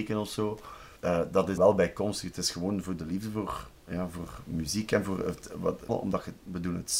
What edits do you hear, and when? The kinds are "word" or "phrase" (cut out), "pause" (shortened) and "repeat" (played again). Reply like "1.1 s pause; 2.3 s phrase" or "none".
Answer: 1.0 s pause; 1.6 s word; 5.9 s word